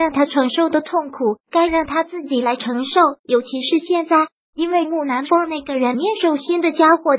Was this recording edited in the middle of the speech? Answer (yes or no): yes